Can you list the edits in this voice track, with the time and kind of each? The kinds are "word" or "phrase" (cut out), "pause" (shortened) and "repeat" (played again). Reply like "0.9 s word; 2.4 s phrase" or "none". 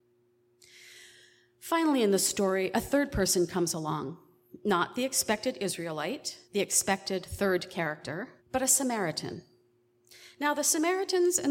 6.4 s pause; 8.4 s pause